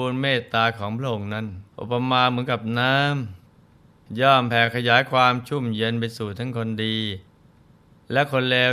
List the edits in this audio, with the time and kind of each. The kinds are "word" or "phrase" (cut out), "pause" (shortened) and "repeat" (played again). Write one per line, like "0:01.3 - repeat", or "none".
0:01.7 - pause